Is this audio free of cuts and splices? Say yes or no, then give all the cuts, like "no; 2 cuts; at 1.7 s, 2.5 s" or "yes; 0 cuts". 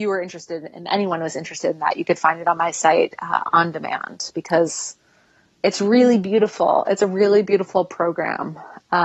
yes; 0 cuts